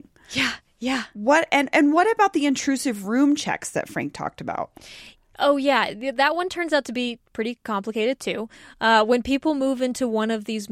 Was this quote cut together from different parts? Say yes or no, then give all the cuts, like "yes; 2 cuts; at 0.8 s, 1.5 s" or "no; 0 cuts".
no; 0 cuts